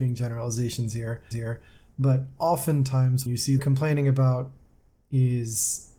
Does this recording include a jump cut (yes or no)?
yes